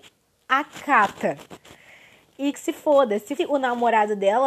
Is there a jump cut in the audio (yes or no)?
yes